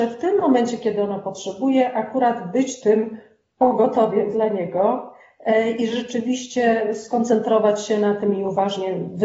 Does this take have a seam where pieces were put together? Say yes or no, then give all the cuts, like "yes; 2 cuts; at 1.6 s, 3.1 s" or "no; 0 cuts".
no; 0 cuts